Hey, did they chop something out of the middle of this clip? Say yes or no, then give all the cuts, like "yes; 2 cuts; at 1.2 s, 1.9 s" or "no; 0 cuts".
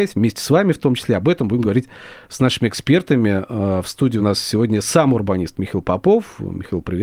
no; 0 cuts